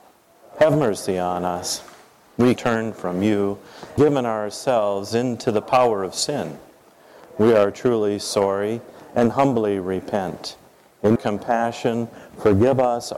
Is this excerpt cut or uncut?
cut